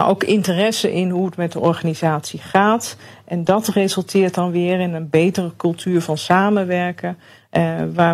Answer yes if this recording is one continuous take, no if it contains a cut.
yes